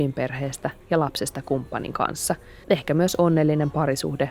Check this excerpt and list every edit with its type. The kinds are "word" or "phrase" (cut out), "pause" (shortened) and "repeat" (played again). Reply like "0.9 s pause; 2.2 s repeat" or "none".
2.6 s pause